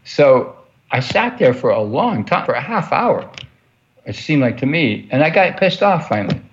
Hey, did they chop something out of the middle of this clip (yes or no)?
yes